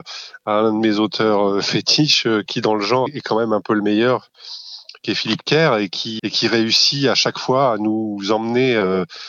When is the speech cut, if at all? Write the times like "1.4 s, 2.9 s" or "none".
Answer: 2.5 s, 3.1 s, 6.2 s